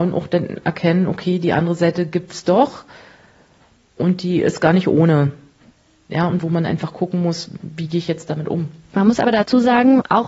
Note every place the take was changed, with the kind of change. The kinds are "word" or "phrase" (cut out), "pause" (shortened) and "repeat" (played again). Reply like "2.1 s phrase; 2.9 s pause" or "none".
none